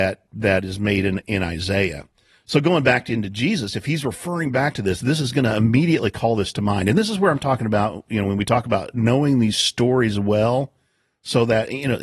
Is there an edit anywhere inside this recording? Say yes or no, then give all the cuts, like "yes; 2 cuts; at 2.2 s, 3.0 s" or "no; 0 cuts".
no; 0 cuts